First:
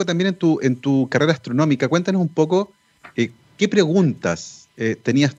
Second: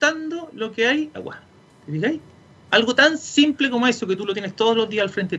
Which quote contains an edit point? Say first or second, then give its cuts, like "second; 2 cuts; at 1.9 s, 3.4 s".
second; 1 cut; at 1.1 s